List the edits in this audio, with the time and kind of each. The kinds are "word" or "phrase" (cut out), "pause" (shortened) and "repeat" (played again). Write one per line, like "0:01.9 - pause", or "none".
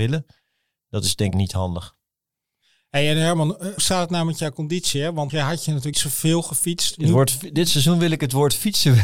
0:01.3 - word
0:03.8 - word
0:05.3 - word
0:05.9 - word